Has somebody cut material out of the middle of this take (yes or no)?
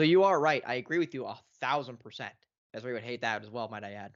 yes